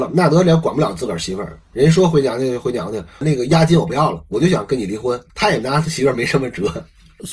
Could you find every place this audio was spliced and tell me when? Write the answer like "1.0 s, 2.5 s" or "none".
5.3 s